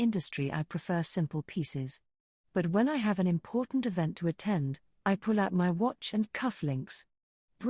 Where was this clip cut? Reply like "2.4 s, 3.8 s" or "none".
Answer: none